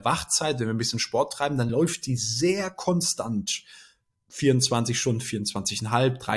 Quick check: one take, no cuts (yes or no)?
yes